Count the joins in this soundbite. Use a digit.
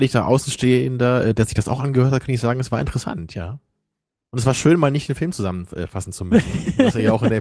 0